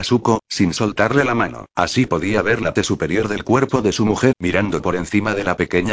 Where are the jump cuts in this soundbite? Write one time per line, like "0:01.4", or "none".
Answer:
0:01.7
0:02.8
0:04.3